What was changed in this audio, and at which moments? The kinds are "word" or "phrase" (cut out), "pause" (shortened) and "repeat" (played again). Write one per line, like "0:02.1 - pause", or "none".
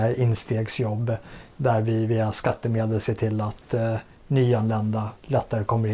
none